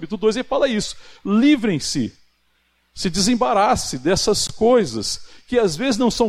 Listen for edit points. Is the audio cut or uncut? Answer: uncut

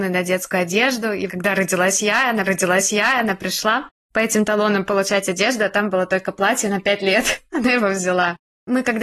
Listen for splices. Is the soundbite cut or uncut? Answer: cut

